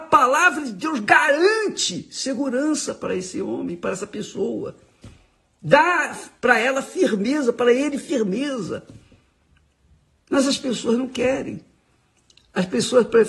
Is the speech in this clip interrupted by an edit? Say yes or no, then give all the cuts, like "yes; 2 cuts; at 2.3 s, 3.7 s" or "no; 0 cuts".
no; 0 cuts